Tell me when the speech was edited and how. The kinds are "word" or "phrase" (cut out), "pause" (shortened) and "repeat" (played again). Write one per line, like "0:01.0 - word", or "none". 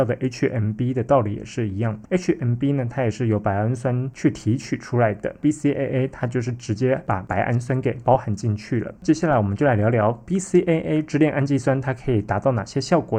0:09.0 - pause